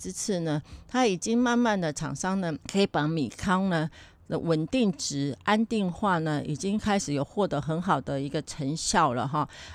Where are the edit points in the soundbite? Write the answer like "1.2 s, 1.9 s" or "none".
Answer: 2.6 s